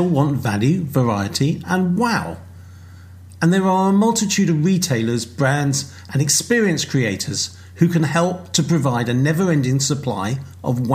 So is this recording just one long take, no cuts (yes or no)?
yes